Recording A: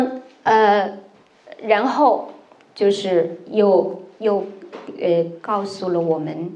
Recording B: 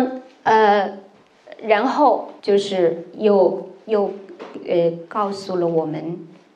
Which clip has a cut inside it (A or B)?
B